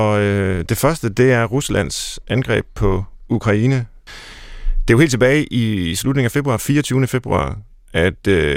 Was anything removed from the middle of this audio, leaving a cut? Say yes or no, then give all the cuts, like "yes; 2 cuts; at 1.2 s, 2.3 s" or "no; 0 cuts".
no; 0 cuts